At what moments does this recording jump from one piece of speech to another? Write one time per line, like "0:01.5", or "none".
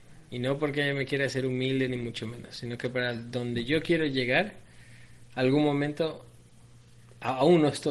none